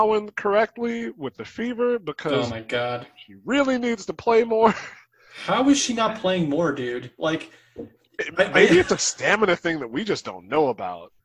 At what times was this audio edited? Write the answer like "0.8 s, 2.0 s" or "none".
none